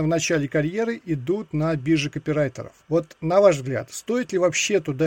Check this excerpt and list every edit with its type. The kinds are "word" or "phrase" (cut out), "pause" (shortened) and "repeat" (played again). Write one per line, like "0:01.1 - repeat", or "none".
0:02.8 - pause